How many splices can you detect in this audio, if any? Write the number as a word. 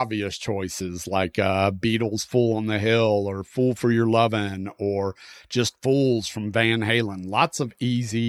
zero